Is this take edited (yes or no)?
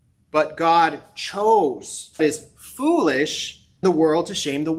yes